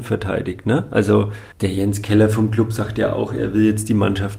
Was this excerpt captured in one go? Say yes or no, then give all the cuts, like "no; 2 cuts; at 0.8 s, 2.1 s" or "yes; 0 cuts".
no; 1 cut; at 1.5 s